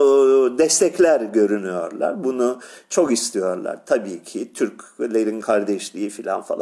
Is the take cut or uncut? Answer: uncut